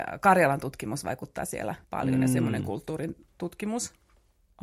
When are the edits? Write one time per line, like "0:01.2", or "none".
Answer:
0:01.8